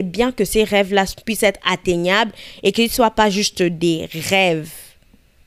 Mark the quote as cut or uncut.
uncut